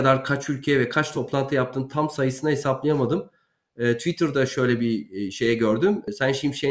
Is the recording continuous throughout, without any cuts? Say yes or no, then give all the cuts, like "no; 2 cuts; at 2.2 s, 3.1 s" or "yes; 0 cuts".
yes; 0 cuts